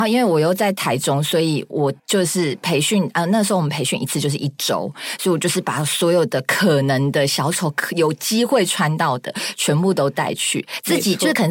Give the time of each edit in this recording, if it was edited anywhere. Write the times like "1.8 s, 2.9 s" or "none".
2.0 s